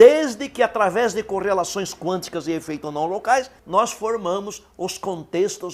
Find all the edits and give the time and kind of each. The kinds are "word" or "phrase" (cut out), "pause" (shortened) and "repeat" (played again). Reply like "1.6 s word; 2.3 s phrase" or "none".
3.6 s pause